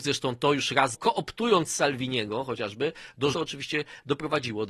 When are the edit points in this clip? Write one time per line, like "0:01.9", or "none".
0:00.9
0:03.3